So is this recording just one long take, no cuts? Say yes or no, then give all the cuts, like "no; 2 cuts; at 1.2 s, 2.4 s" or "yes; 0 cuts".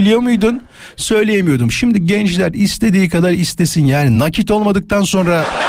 yes; 0 cuts